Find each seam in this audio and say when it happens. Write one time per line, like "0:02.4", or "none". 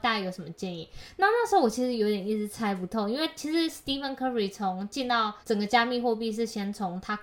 0:05.4

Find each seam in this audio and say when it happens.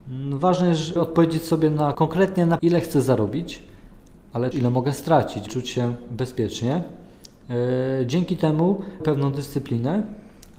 0:01.0
0:01.9
0:02.6
0:04.5
0:05.5
0:09.0

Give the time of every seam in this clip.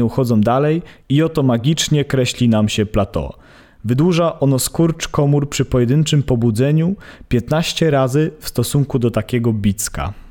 none

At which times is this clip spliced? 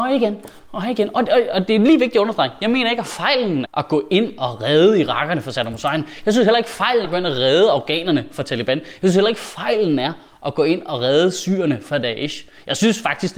0:03.6
0:07.0

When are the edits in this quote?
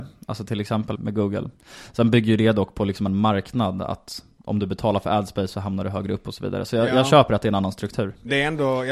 0:01.0

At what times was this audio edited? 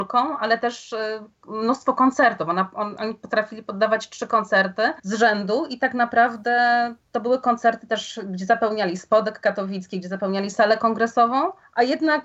0:05.0

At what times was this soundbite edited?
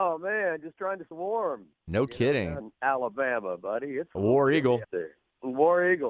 0:01.1
0:02.6
0:04.8

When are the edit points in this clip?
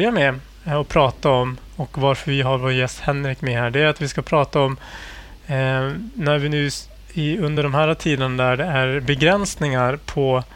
none

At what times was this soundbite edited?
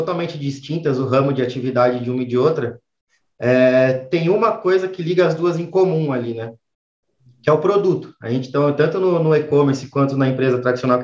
none

